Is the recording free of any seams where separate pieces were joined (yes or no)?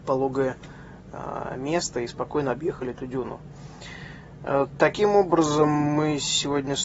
yes